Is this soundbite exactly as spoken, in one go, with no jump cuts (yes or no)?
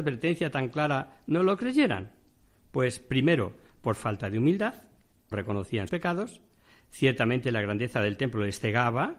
no